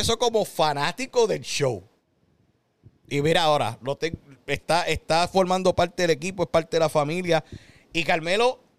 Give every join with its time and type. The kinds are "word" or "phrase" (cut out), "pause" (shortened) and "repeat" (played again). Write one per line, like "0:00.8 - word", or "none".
none